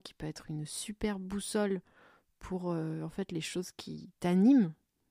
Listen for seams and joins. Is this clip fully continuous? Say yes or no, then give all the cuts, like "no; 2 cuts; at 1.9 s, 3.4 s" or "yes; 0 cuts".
yes; 0 cuts